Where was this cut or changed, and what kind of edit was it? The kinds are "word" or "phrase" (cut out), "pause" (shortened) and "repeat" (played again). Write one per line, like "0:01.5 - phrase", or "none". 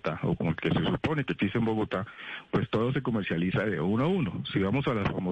none